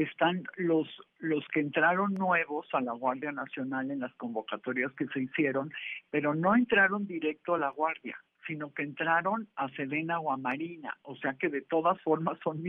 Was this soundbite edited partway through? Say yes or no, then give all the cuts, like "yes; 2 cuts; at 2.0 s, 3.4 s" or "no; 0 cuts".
no; 0 cuts